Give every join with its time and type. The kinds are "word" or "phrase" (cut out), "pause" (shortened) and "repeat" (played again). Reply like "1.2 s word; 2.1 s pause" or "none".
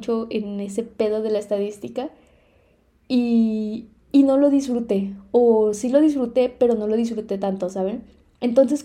none